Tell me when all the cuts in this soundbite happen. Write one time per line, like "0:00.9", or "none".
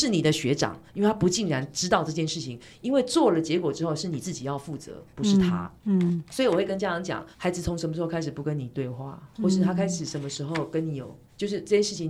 0:05.8
0:07.3